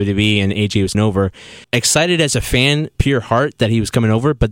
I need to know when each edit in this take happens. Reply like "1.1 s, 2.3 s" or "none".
0.9 s, 1.6 s, 2.9 s